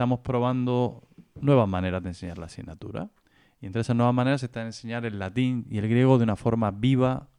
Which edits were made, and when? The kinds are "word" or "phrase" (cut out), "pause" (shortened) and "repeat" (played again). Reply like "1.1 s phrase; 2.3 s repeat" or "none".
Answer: none